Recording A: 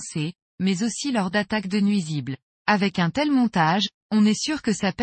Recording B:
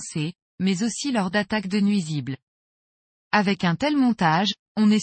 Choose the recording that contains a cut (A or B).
A